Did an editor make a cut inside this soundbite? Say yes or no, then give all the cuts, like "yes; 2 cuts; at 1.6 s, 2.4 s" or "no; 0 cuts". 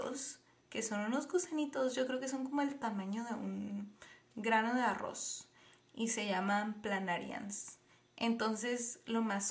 no; 0 cuts